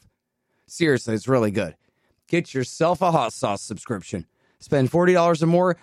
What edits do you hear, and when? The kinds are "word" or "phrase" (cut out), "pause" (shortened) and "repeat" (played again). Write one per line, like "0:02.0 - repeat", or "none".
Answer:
none